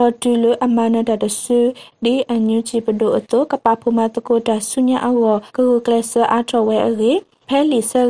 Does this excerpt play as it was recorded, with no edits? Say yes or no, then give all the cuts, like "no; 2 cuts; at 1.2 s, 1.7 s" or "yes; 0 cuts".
no; 1 cut; at 5.5 s